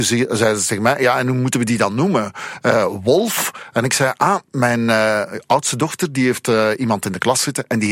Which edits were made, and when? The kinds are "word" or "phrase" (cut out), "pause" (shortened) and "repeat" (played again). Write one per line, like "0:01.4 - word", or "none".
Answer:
none